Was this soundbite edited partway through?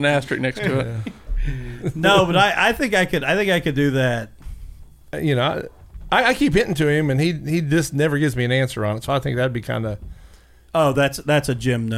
no; 0 cuts

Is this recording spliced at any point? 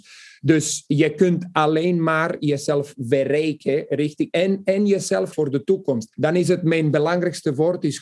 yes; 2 cuts; at 5.3 s, 6.1 s

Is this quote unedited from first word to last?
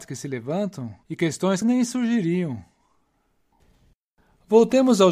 no; 2 cuts; at 1.0 s, 1.6 s

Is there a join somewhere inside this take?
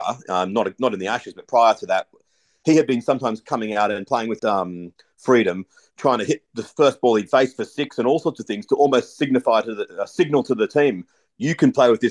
yes; 1 cut; at 4.4 s

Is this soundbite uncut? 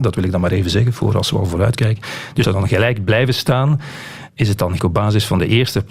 no; 2 cuts; at 2.4 s, 4.8 s

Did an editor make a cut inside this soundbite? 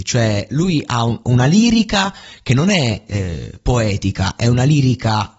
no; 0 cuts

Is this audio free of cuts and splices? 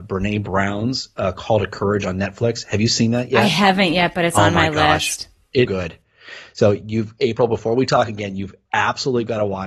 no; 1 cut; at 5.6 s

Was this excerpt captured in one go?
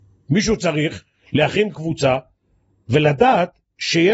yes; 0 cuts

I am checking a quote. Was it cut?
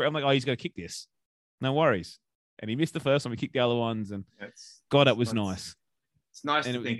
no; 0 cuts

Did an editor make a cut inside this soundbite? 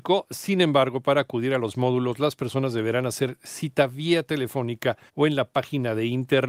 yes; 1 cut; at 5.1 s

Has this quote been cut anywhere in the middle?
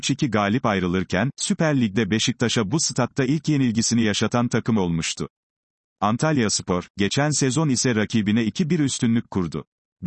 no; 0 cuts

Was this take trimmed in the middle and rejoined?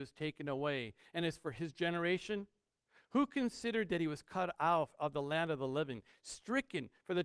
no; 0 cuts

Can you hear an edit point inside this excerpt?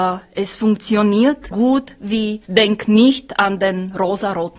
yes; 2 cuts; at 1.5 s, 2.4 s

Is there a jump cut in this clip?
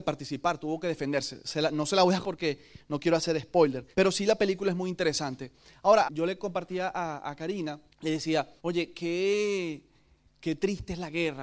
yes; 5 cuts; at 2.2 s, 3.9 s, 6.0 s, 7.9 s, 8.6 s

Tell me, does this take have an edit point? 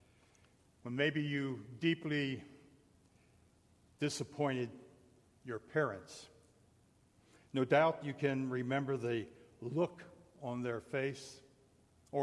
no; 0 cuts

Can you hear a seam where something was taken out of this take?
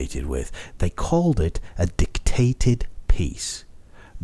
no; 0 cuts

